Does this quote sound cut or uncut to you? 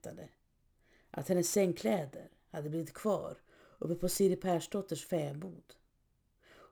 uncut